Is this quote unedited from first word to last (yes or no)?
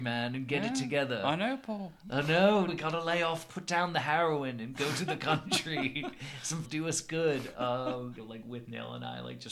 no